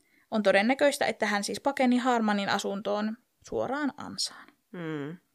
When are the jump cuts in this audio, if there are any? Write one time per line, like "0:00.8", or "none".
none